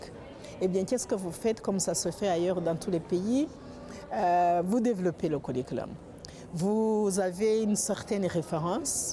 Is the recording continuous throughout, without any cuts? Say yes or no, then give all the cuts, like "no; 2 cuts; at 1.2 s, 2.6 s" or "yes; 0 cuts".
yes; 0 cuts